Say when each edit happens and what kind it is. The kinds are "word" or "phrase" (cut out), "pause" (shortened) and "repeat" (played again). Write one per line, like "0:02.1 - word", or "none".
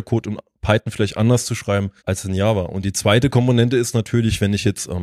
0:02.0 - pause